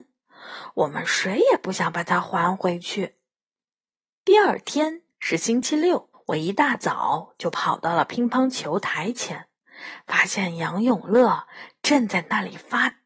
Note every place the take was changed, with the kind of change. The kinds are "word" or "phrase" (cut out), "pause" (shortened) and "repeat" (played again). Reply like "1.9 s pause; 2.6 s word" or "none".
6.1 s pause

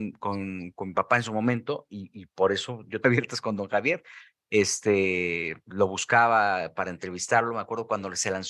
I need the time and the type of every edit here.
3.0 s phrase

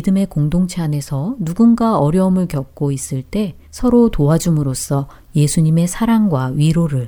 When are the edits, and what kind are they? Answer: 3.6 s pause

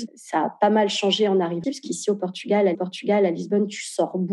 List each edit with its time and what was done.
1.6 s word; 2.7 s repeat

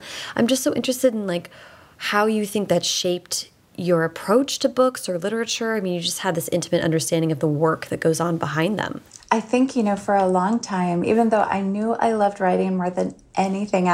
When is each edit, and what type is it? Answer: none

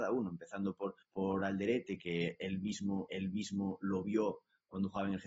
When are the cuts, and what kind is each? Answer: 1.0 s pause; 3.1 s repeat

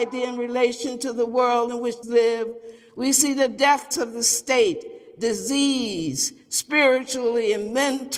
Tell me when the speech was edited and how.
2.0 s word; 3.9 s word

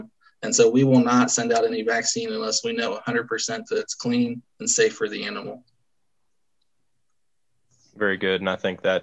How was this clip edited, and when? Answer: none

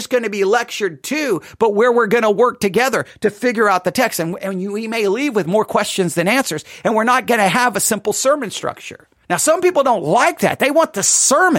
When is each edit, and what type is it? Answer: 9.2 s pause

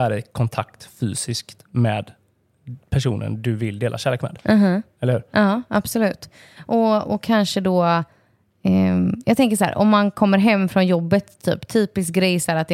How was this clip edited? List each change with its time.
none

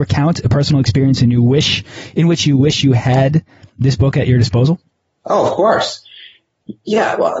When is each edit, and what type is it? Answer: none

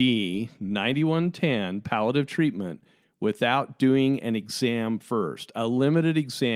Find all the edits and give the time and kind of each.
none

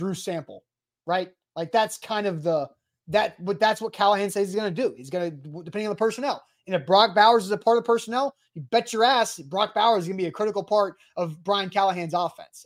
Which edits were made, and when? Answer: none

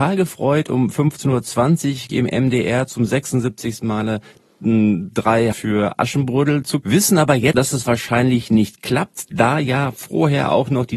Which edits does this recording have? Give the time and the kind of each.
2.1 s word; 5.5 s word; 6.8 s word; 7.5 s word

